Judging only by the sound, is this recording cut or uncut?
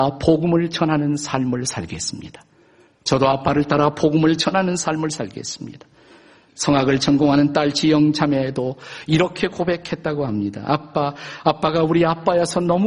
uncut